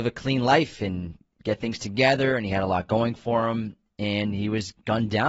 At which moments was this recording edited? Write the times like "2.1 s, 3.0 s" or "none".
none